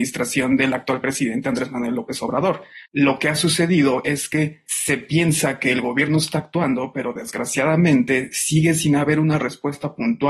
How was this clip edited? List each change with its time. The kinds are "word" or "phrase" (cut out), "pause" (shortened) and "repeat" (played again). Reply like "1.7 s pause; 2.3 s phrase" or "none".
2.9 s pause